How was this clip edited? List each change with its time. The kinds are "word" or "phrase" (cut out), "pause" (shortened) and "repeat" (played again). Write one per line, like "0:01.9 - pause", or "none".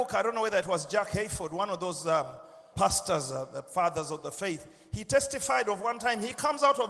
0:02.7 - word